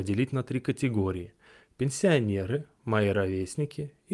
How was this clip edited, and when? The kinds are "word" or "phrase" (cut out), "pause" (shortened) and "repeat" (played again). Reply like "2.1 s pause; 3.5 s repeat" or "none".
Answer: none